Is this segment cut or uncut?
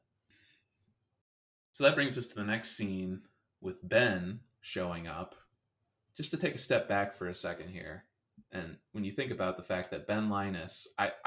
uncut